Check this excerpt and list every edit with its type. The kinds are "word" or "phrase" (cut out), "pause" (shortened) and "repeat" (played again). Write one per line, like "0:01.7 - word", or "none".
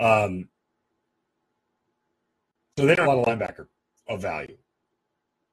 0:03.0 - word
0:03.8 - pause